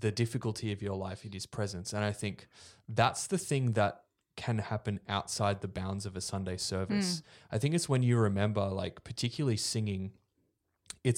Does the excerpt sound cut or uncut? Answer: uncut